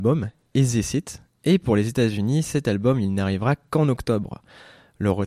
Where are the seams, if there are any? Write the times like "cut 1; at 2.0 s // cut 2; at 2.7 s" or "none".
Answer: none